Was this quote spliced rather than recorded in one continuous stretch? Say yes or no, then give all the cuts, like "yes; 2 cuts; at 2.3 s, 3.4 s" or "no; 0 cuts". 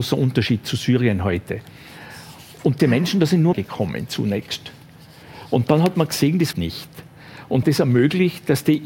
yes; 4 cuts; at 2.8 s, 3.5 s, 6.5 s, 7.6 s